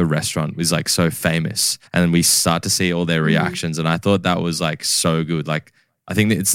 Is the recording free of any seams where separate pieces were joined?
no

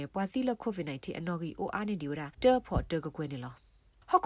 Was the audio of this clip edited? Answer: yes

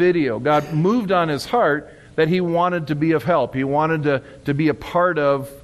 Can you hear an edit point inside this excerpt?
no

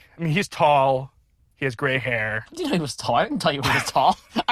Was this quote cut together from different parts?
no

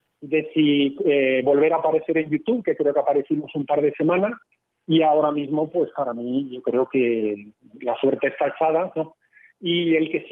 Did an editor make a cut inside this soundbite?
no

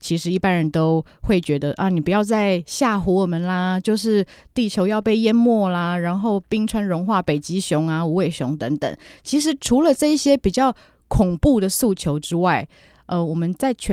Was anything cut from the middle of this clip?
no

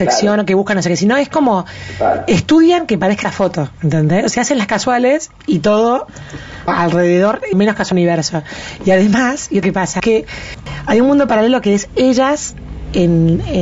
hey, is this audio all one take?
no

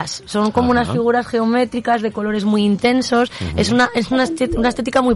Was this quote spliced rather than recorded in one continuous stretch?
no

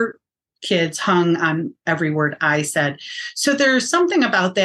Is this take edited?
no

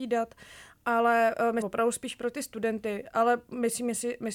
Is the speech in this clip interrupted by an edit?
yes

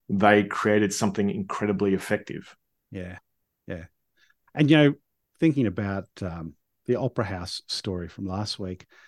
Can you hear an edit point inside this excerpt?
no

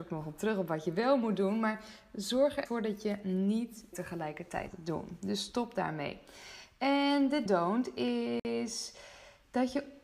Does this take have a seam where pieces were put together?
yes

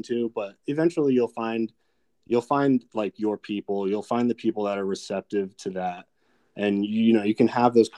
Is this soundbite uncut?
yes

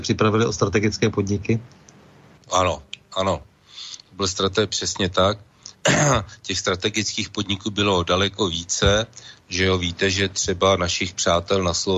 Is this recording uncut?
yes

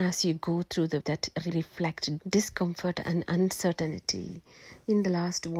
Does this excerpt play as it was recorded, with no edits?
no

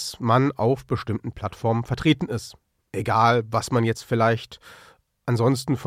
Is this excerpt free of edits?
yes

